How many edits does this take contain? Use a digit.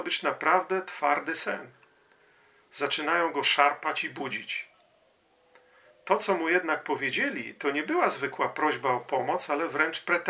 0